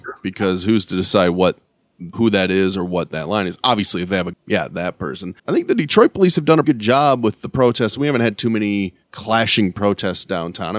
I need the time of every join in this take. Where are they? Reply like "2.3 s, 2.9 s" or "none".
2.1 s, 4.3 s, 5.4 s, 6.6 s, 9.0 s